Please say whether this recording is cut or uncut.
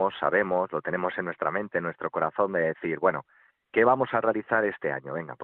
uncut